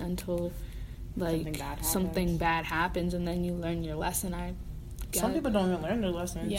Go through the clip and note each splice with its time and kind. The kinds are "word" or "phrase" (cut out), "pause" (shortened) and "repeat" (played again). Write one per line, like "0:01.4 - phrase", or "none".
none